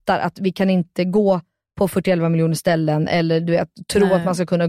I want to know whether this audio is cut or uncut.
uncut